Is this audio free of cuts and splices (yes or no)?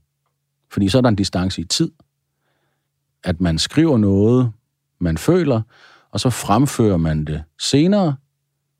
yes